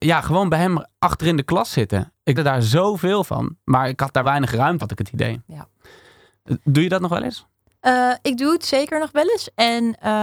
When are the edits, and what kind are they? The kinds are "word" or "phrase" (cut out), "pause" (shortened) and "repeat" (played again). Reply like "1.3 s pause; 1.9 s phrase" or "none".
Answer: 2.3 s word; 4.2 s word; 4.8 s word